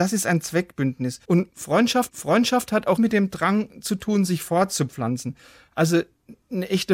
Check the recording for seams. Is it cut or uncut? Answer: cut